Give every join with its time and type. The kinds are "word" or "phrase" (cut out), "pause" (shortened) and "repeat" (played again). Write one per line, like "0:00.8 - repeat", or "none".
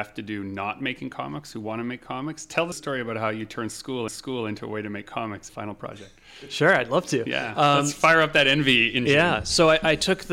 0:02.7 - word
0:04.1 - repeat
0:05.5 - phrase